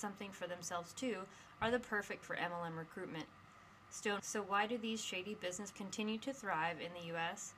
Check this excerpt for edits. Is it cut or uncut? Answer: cut